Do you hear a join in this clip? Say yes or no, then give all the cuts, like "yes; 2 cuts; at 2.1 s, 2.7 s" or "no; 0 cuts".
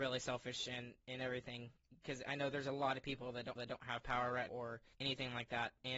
yes; 3 cuts; at 3.6 s, 4.5 s, 4.9 s